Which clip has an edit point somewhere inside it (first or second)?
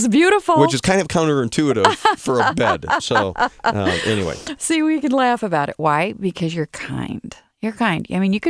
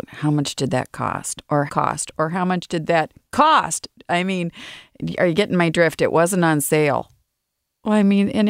second